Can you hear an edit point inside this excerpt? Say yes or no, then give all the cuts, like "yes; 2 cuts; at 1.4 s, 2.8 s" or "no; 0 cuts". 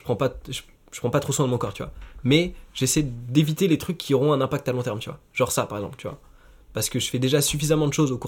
no; 0 cuts